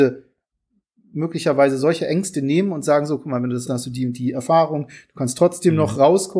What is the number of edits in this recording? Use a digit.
1